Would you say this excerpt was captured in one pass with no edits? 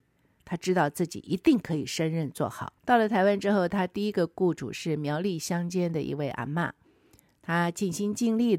no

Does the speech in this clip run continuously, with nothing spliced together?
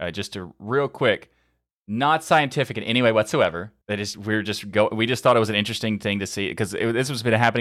no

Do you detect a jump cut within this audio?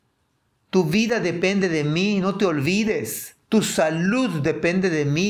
yes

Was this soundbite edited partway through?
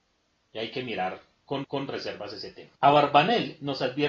yes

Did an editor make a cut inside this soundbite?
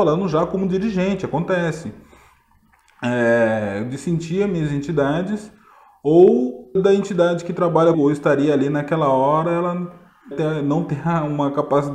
yes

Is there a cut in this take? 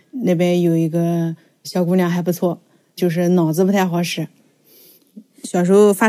no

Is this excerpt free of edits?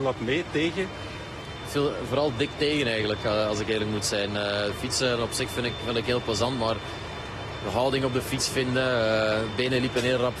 yes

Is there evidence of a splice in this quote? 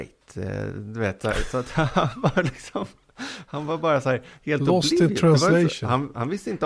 no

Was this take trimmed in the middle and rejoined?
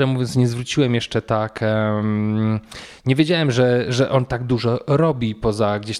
yes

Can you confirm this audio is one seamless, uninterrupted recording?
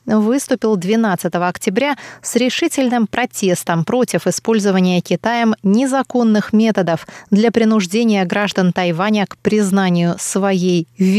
yes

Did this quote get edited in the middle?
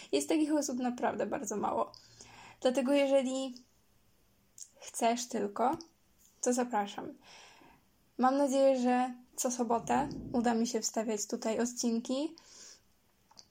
yes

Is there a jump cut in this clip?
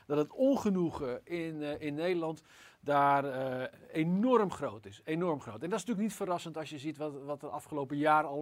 no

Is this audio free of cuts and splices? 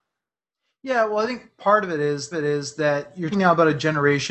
no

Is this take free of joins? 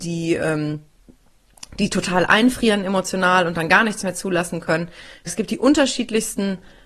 no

